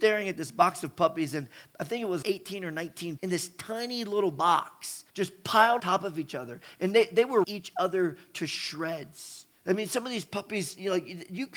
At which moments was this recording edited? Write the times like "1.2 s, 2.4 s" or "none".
2.2 s, 3.2 s, 5.1 s, 5.8 s, 7.4 s, 9.6 s